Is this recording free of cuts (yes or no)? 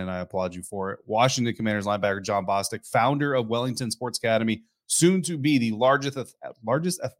yes